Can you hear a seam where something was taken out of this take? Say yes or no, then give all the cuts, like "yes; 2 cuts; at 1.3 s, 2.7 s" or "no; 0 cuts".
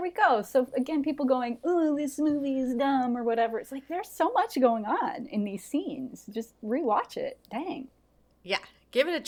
no; 0 cuts